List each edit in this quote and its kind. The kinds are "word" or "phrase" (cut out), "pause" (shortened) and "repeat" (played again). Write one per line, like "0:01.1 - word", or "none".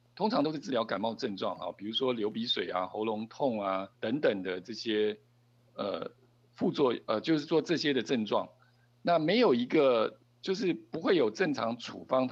0:03.9 - pause